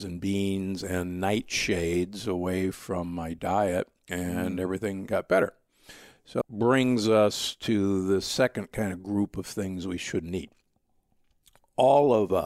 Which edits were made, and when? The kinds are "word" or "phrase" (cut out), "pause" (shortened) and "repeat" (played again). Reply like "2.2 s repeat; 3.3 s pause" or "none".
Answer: 6.4 s word